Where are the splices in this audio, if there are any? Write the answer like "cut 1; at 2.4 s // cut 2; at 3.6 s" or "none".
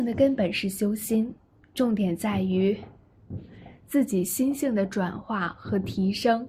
none